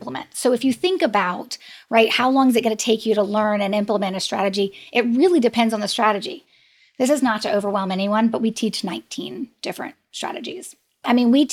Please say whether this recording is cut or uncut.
uncut